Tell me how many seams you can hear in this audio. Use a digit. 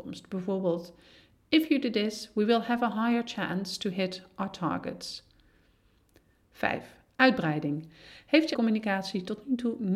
1